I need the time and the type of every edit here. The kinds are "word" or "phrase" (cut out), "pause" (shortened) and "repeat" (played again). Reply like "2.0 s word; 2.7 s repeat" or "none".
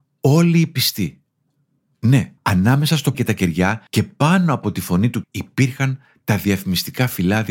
2.4 s pause; 3.1 s word; 3.9 s pause; 5.2 s word

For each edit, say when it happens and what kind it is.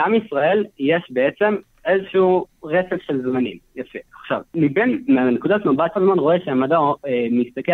4.5 s pause; 6.0 s phrase

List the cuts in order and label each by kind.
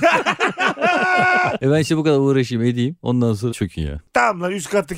3.5 s word

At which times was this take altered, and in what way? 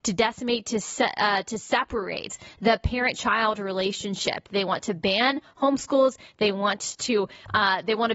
none

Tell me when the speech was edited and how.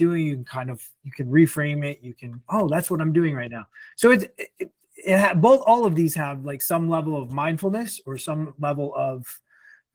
none

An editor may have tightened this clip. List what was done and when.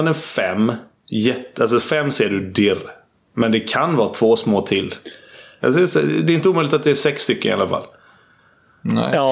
none

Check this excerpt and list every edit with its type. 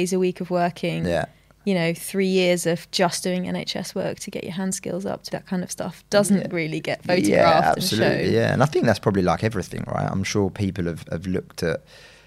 5.3 s phrase

